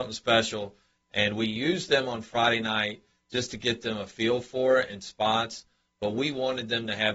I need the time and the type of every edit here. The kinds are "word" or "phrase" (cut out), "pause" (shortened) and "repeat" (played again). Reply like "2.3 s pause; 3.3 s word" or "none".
none